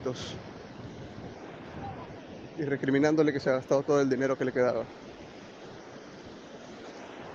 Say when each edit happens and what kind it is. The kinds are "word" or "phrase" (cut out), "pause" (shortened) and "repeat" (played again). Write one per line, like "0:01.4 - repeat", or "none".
none